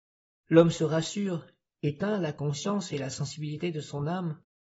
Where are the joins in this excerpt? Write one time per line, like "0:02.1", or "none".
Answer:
none